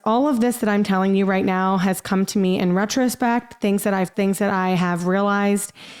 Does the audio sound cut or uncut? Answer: cut